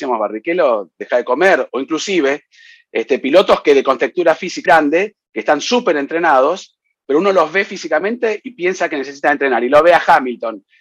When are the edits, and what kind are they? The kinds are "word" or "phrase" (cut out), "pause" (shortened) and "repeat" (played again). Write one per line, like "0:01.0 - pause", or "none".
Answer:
0:04.7 - word

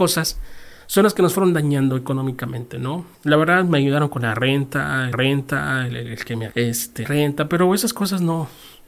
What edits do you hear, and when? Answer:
0:03.1 - pause
0:05.1 - repeat
0:06.5 - word
0:07.0 - phrase

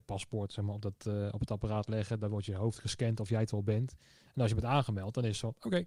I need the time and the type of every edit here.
none

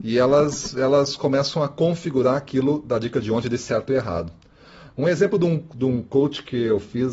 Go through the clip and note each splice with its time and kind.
none

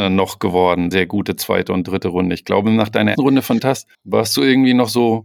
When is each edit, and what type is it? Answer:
0:00.9 - phrase
0:03.1 - word
0:03.6 - phrase
0:03.9 - pause

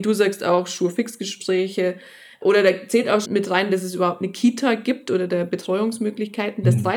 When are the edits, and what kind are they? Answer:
0:03.2 - word

